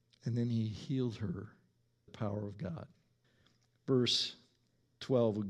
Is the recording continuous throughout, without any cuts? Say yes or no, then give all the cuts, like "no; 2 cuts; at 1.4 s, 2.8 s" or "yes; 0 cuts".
no; 2 cuts; at 2.1 s, 3.2 s